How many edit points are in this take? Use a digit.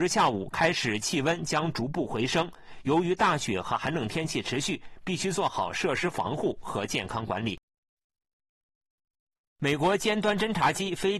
0